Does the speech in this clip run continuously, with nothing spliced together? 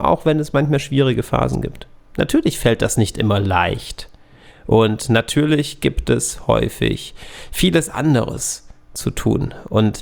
yes; 0 cuts

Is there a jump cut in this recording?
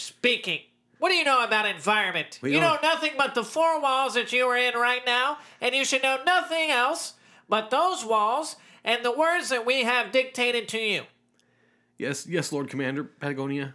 no; 0 cuts

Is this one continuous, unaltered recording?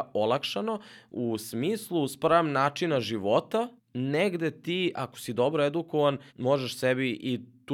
no; 2 cuts; at 3.8 s, 6.3 s

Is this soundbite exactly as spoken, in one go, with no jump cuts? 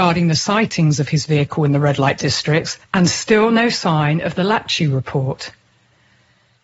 no; 1 cut; at 2.8 s

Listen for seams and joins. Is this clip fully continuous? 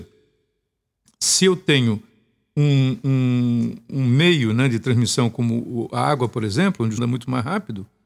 no; 1 cut; at 7.0 s

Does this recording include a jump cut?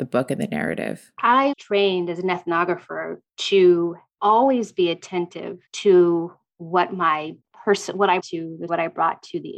yes; 6 cuts; at 1.5 s, 3.3 s, 5.7 s, 7.4 s, 8.2 s, 8.7 s

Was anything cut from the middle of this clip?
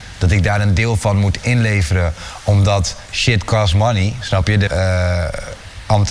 yes; 1 cut; at 4.7 s

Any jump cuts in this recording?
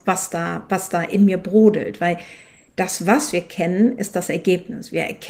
no; 0 cuts

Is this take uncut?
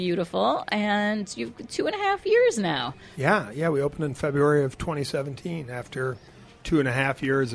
yes; 0 cuts

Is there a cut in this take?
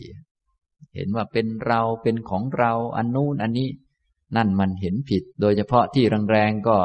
yes; 1 cut; at 5.3 s

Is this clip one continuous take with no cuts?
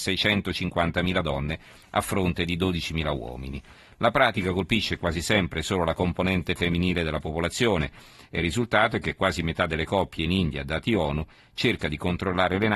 yes; 0 cuts

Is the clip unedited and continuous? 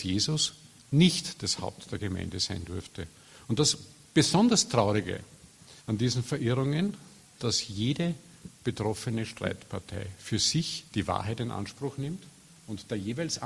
no; 3 cuts; at 5.8 s, 7.4 s, 10.9 s

